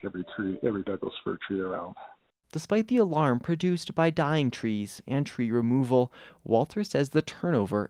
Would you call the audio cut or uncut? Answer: uncut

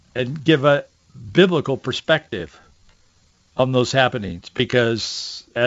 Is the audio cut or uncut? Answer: uncut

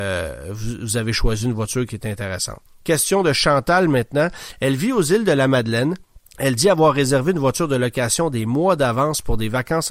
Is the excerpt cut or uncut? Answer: cut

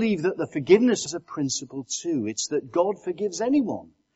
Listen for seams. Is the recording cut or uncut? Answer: cut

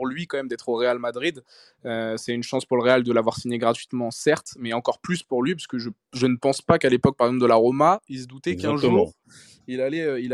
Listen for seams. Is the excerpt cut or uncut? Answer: uncut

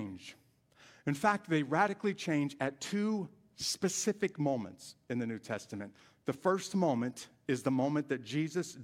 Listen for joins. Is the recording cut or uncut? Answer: uncut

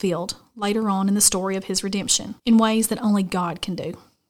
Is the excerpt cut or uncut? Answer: cut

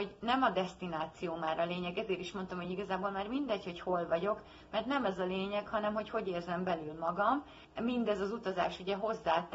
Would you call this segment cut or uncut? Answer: uncut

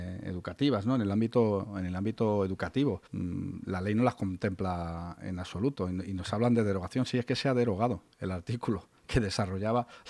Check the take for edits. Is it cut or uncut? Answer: cut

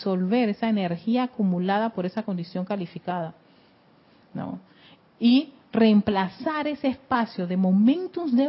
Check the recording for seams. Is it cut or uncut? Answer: uncut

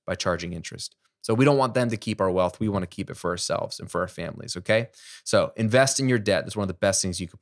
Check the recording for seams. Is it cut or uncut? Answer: uncut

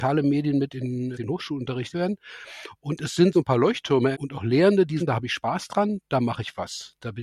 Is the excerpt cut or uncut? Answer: cut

